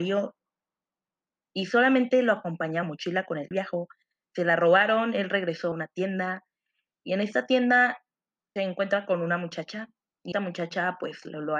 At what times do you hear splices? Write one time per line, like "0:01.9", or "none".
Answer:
0:02.8
0:03.5
0:05.7
0:08.6
0:10.3